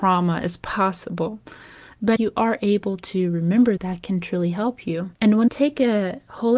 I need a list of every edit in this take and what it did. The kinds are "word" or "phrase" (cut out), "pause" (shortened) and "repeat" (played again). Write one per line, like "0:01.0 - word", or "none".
0:02.2 - word
0:03.8 - word
0:05.1 - pause
0:05.5 - word